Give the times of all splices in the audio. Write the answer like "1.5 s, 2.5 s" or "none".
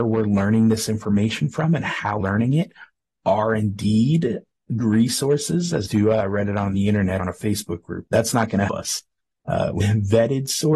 2.2 s, 4.8 s, 5.9 s, 7.2 s, 8.7 s, 9.8 s